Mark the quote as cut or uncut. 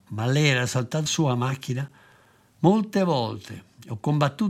cut